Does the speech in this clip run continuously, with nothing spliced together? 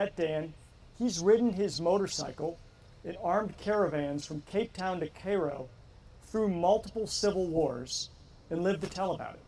yes; 0 cuts

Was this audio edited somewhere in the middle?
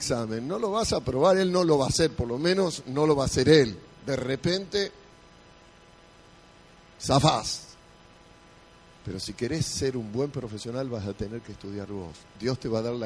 no; 0 cuts

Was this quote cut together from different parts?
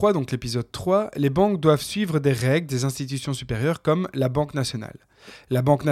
no; 0 cuts

